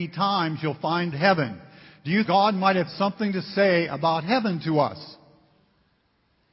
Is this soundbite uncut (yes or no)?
no